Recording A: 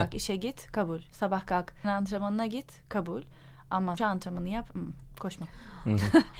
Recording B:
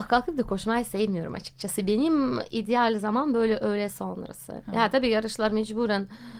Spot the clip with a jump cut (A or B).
A